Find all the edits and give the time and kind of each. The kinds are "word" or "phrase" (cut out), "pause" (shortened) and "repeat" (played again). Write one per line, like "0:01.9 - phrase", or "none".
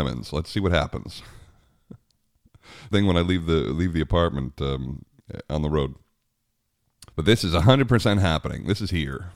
0:02.9 - phrase
0:07.1 - pause